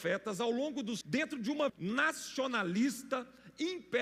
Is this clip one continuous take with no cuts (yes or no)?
no